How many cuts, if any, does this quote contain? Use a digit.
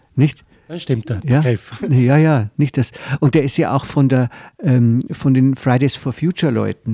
0